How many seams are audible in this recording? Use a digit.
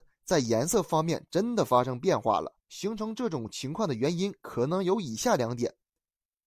1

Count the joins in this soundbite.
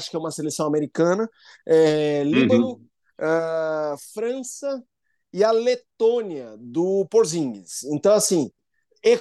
0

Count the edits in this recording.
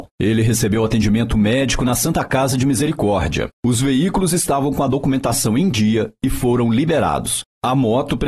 0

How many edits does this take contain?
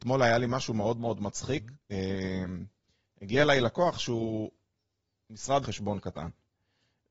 1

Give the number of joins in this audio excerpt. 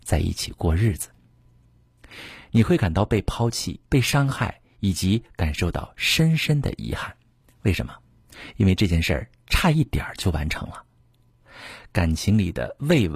2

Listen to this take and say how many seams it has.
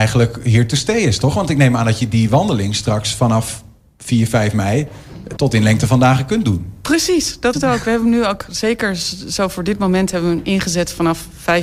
2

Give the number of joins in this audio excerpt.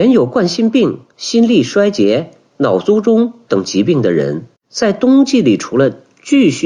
2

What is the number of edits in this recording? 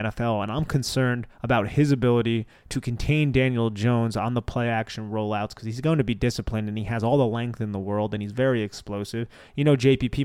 1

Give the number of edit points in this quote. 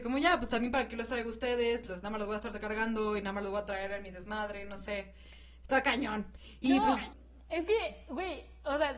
0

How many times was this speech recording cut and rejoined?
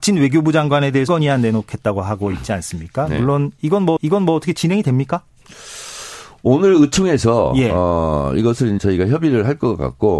3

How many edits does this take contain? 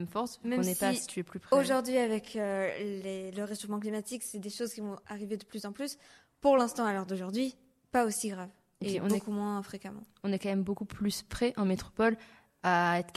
0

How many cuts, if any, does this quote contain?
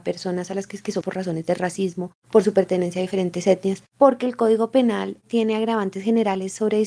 4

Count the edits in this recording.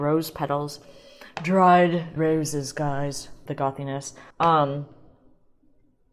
3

